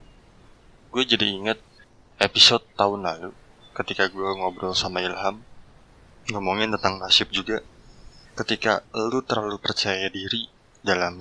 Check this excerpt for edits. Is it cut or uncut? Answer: cut